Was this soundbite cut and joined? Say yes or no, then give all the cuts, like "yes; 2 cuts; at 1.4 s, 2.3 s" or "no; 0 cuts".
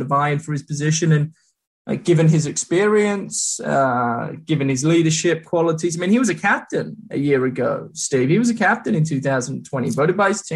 no; 0 cuts